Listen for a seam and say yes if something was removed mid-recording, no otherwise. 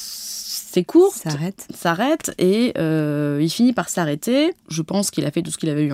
yes